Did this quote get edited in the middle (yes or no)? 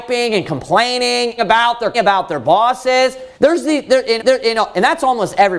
yes